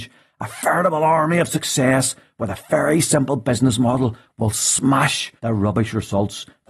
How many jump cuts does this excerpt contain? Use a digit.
1